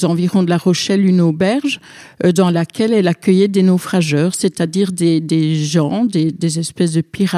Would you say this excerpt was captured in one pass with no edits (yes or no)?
yes